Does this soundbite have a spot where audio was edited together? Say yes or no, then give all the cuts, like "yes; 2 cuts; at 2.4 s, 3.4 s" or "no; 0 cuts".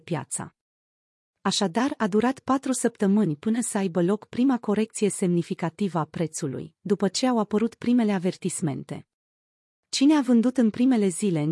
no; 0 cuts